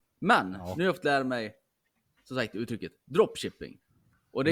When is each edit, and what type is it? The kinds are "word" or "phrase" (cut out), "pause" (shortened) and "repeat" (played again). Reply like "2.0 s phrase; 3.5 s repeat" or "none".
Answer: none